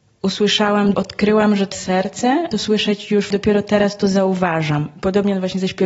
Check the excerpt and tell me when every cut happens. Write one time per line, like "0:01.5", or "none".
0:00.9
0:01.7
0:02.5
0:03.3